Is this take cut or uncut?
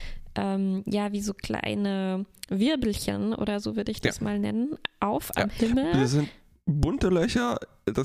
uncut